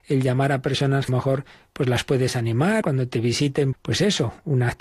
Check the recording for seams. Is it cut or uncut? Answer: cut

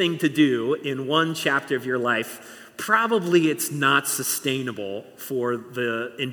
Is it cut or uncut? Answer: uncut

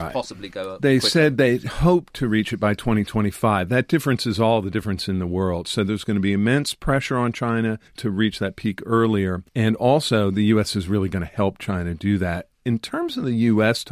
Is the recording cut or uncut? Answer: cut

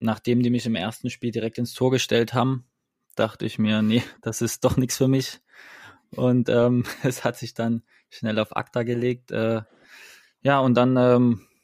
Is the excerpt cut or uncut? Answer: uncut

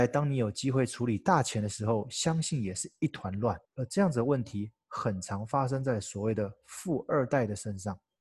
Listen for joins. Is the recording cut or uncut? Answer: cut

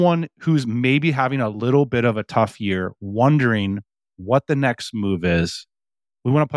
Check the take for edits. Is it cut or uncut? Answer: uncut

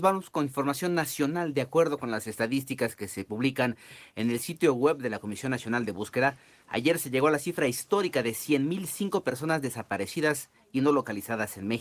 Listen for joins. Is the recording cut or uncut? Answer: uncut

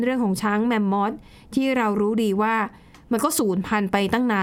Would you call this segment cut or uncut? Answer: uncut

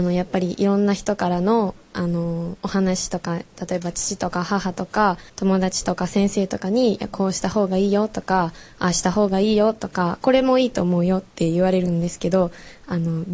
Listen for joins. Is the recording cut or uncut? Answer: cut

